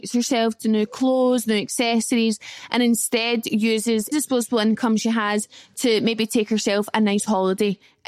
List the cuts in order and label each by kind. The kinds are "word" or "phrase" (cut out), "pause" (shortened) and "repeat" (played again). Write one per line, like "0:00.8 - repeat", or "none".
0:04.1 - word